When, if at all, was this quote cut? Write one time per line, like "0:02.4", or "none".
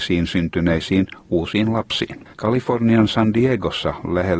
0:02.3